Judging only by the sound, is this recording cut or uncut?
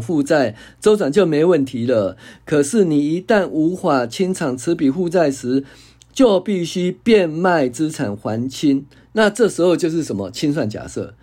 uncut